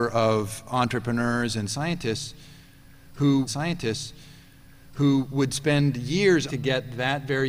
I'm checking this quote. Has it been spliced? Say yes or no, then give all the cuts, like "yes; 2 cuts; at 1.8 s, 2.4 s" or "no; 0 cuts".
yes; 2 cuts; at 3.5 s, 6.5 s